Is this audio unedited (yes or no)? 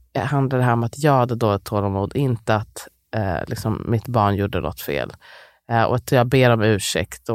yes